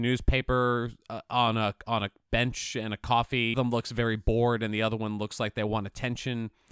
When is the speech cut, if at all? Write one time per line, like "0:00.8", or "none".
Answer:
0:03.5